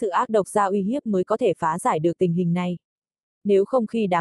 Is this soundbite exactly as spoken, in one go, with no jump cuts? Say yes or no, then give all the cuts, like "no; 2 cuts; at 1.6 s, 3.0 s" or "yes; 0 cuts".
yes; 0 cuts